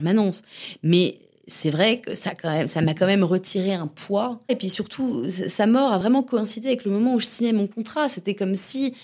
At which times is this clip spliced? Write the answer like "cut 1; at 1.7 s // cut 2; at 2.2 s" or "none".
none